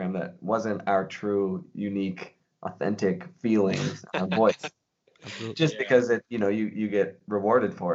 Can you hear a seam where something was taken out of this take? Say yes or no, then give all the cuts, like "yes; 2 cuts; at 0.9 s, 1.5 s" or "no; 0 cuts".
no; 0 cuts